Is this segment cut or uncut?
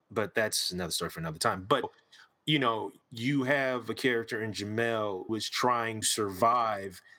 cut